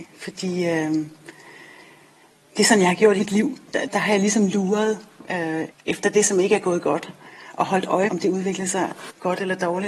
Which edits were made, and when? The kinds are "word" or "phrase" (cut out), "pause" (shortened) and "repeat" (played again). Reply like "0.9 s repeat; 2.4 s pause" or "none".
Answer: 3.2 s word; 3.9 s word; 5.7 s word; 8.1 s word